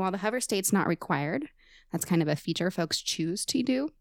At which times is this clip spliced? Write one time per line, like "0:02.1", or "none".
none